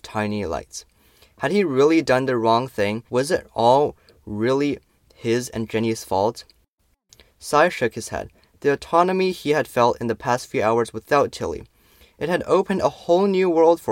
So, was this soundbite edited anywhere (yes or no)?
yes